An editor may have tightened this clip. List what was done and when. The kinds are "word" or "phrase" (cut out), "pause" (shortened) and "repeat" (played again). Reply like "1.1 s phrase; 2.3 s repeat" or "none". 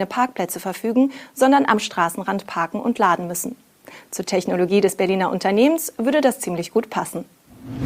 none